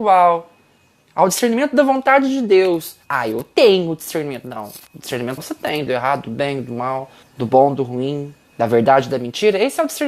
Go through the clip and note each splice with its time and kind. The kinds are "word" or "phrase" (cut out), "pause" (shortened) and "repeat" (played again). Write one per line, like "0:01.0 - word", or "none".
0:03.0 - pause
0:05.4 - word
0:05.9 - word
0:07.2 - pause
0:08.4 - pause